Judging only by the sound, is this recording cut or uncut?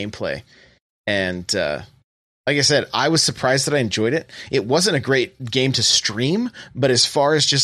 uncut